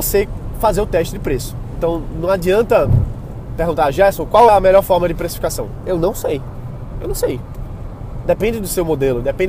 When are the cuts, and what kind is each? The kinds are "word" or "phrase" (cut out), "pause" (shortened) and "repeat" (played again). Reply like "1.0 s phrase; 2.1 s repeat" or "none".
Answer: 4.5 s word